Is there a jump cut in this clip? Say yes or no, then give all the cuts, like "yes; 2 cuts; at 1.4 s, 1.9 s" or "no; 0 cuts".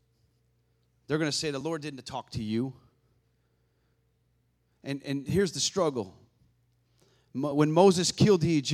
no; 0 cuts